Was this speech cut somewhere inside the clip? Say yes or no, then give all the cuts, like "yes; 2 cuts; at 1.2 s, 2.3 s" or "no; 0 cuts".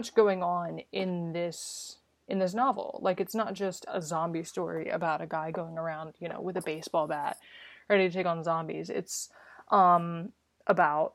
no; 0 cuts